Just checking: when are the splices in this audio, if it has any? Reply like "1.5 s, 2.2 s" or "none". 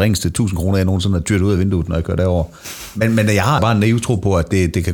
3.6 s